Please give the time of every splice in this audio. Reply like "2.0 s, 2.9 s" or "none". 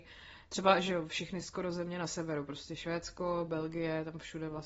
none